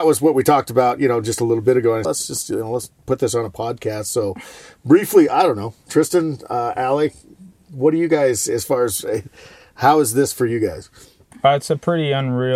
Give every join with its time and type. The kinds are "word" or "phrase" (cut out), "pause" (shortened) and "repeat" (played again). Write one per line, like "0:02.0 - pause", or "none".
0:02.0 - phrase

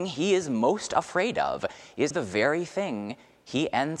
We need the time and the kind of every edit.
0:02.1 - word

